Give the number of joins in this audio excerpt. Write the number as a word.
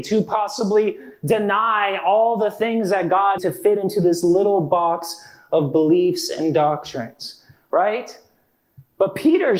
one